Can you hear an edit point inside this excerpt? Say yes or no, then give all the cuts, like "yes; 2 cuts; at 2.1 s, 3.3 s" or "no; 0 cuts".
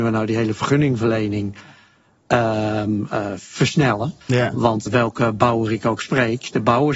yes; 2 cuts; at 4.2 s, 4.9 s